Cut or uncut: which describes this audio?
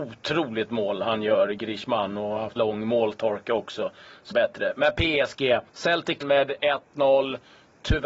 cut